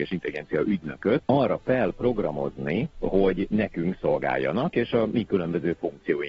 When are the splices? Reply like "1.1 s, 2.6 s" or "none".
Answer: 1.2 s, 2.9 s